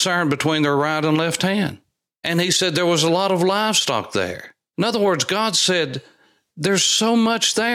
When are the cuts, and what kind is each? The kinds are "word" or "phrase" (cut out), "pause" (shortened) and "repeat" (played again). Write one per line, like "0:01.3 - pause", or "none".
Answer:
none